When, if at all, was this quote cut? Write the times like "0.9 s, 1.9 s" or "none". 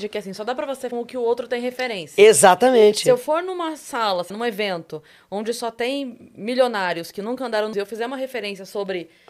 0.9 s, 4.3 s, 7.7 s